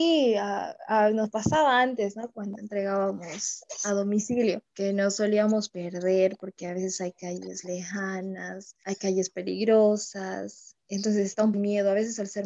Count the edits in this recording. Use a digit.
1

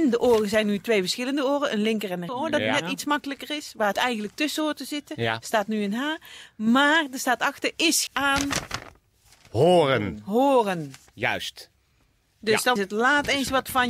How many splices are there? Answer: 4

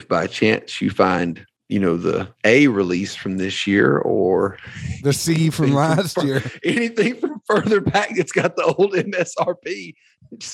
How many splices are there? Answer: 1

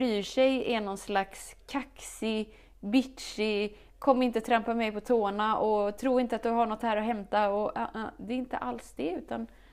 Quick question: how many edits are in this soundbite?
0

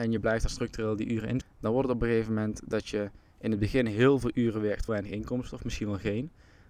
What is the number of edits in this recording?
2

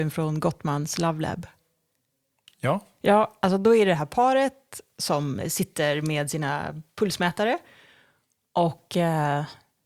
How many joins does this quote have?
1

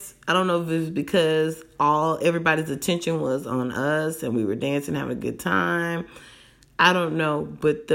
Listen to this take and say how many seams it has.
0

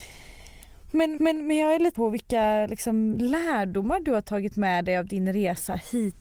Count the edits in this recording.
2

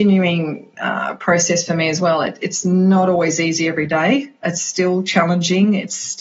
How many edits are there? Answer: 0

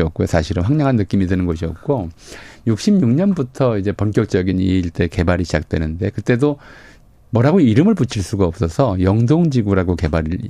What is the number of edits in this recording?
0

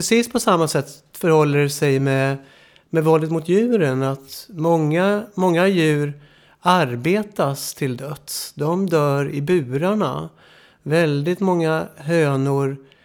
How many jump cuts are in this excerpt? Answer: 0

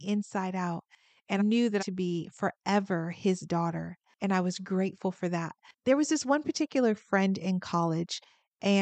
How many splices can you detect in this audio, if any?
3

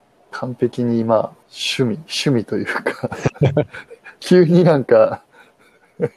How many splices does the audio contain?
1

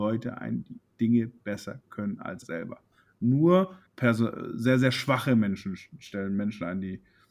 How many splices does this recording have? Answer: 2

